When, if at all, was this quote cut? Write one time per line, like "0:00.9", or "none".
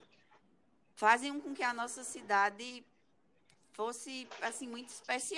none